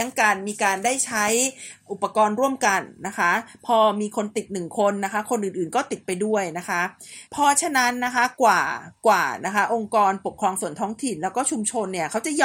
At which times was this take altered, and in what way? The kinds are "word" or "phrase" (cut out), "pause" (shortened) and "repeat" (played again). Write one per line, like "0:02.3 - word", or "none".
0:07.3 - pause